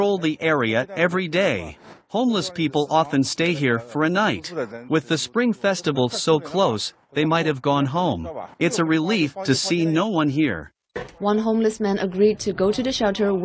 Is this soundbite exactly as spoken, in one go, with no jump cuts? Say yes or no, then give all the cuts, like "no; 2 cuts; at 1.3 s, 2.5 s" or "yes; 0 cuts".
no; 1 cut; at 8.5 s